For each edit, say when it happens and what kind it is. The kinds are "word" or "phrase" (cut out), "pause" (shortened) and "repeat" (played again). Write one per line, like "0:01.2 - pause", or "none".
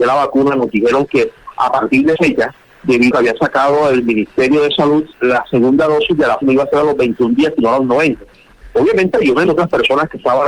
0:02.2 - word
0:03.1 - phrase
0:05.1 - word
0:06.4 - word
0:09.5 - phrase